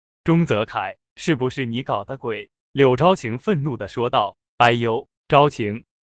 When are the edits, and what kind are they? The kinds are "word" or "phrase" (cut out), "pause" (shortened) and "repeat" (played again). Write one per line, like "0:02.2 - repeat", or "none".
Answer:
0:02.6 - pause
0:04.5 - pause